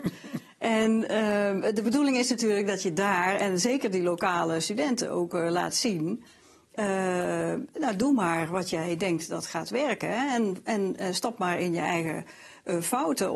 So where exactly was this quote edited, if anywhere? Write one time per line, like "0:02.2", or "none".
none